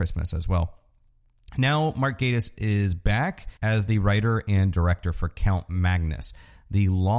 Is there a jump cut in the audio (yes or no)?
yes